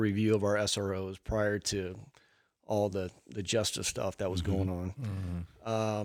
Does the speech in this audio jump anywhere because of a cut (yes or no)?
no